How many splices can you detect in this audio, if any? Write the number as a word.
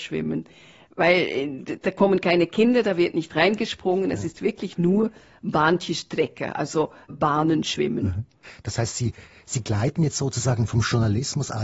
zero